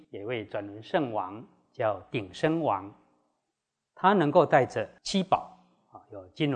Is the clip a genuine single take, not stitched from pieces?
yes; 0 cuts

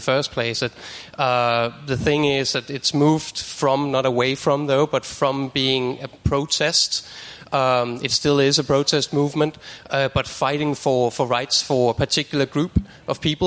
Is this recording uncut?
yes; 0 cuts

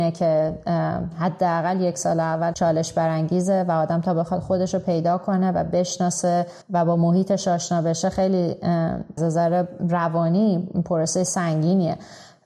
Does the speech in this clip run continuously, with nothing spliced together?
no; 3 cuts; at 2.5 s, 6.6 s, 9.2 s

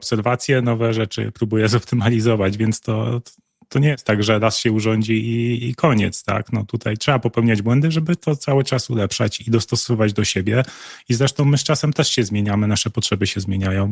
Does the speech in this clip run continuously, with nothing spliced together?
yes; 0 cuts

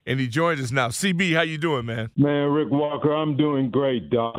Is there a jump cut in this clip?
yes; 1 cut; at 2.1 s

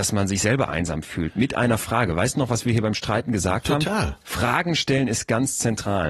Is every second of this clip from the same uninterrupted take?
yes; 0 cuts

